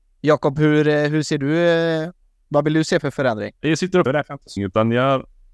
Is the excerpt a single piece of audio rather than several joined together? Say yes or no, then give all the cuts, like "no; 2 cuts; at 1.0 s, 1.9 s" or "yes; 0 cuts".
no; 3 cuts; at 3.6 s, 4.1 s, 4.6 s